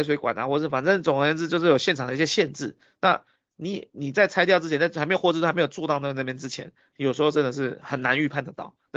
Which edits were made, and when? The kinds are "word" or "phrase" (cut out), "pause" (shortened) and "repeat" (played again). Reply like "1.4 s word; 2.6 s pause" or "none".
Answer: none